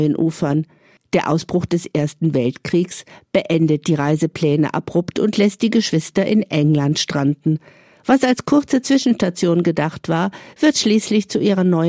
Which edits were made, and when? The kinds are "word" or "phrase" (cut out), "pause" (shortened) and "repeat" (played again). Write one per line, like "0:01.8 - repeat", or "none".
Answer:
none